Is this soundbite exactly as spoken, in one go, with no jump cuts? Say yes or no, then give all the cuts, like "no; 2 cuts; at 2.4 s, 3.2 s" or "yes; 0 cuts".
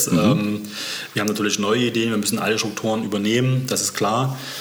yes; 0 cuts